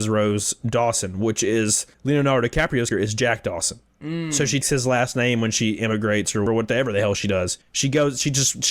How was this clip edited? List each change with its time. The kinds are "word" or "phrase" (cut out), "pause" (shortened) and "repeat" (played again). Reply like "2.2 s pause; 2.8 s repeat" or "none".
1.9 s pause; 2.9 s word; 4.6 s word; 6.5 s word; 7.6 s pause